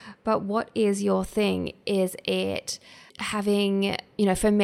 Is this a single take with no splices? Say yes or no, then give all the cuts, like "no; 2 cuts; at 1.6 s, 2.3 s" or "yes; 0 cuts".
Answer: no; 1 cut; at 3.1 s